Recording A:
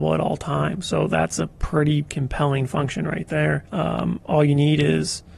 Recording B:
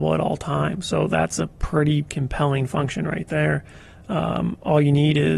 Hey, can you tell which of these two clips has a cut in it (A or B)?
A